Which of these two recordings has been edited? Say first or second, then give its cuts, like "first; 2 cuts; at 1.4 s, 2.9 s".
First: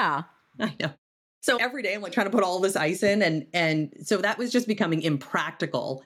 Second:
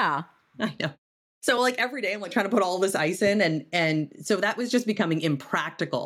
first; 1 cut; at 1.6 s